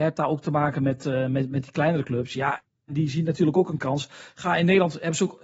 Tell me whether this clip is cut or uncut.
uncut